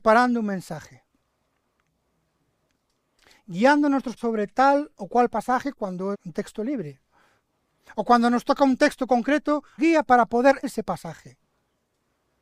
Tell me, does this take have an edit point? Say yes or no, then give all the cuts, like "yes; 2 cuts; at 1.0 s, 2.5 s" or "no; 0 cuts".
yes; 4 cuts; at 4.2 s, 6.1 s, 9.8 s, 10.6 s